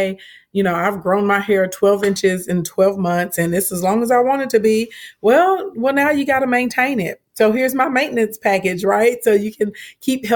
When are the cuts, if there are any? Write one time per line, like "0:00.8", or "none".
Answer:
none